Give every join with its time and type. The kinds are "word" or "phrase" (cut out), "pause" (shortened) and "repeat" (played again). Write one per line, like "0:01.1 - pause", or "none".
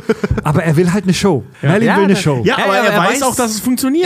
0:01.5 - pause